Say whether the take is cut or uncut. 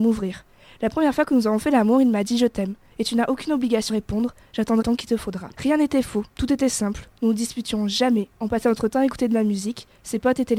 cut